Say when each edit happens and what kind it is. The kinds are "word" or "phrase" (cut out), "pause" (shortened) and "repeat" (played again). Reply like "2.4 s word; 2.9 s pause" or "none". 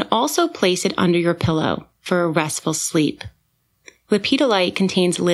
none

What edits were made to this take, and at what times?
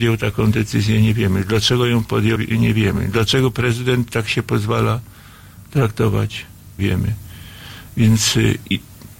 2.4 s word; 6.8 s phrase

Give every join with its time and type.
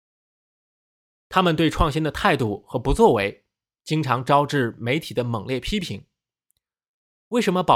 none

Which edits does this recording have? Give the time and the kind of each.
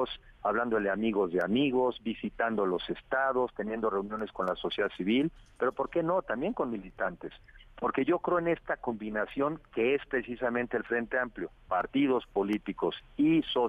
none

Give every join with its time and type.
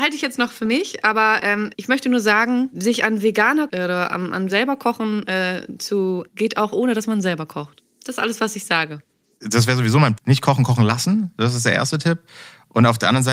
1.7 s word; 3.7 s word; 4.5 s word; 6.3 s word; 10.2 s word

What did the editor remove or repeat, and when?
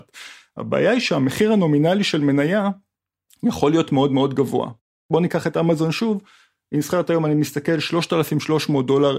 none

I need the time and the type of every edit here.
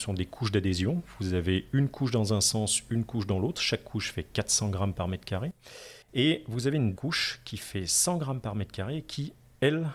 6.0 s pause; 7.0 s word

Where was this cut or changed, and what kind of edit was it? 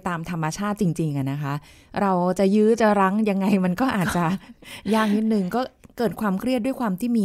none

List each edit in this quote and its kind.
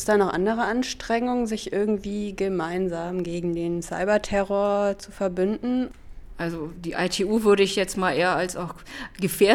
none

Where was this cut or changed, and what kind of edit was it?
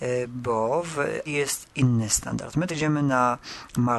1.3 s word; 2.7 s word

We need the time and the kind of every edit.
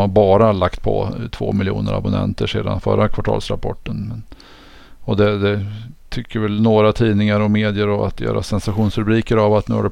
none

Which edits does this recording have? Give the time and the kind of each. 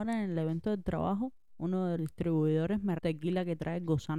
2.0 s word; 3.0 s word

